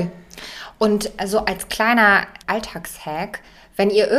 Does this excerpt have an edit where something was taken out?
yes; 1 cut; at 2.4 s

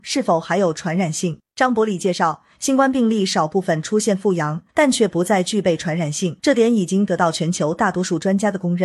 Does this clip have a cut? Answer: yes; 3 cuts; at 1.5 s, 4.7 s, 6.4 s

